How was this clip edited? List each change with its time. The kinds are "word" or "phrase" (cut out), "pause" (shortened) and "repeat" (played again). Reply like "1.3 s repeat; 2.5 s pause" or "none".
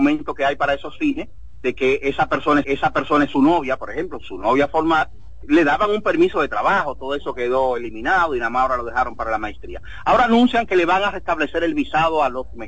2.6 s repeat; 4.2 s word; 5.4 s word